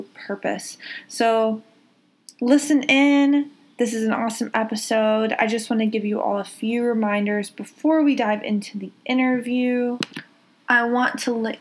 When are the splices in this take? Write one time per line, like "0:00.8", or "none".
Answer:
none